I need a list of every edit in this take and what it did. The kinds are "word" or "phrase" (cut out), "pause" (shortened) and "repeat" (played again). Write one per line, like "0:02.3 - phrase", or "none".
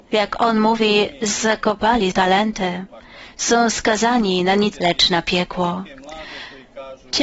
0:02.1 - word
0:04.7 - word